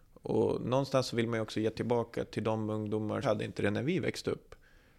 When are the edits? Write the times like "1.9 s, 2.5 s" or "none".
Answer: 3.2 s